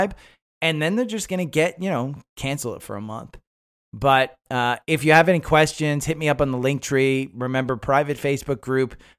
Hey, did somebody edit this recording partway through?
no; 0 cuts

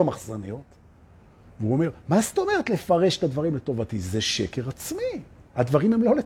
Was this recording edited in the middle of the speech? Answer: no; 0 cuts

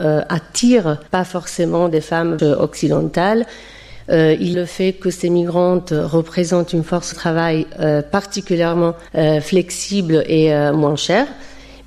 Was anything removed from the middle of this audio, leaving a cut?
yes; 5 cuts; at 1.1 s, 2.4 s, 4.5 s, 7.1 s, 9.1 s

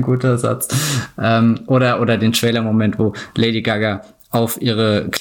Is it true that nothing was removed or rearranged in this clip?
yes; 0 cuts

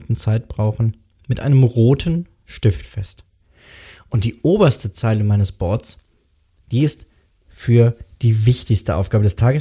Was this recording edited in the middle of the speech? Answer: no; 0 cuts

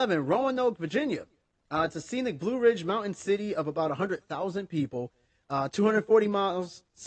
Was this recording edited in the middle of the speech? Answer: no; 0 cuts

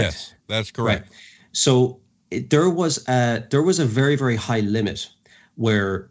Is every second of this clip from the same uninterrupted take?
yes; 0 cuts

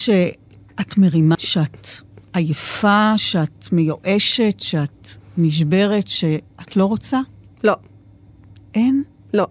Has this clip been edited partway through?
yes; 1 cut; at 1.3 s

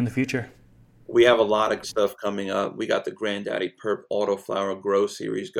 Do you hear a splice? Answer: yes; 1 cut; at 1.8 s

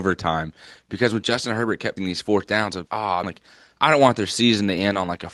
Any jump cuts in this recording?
yes; 3 cuts; at 2.0 s, 2.9 s, 3.2 s

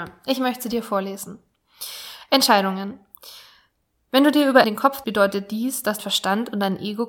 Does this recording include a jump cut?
yes; 3 cuts; at 4.6 s, 5.0 s, 6.0 s

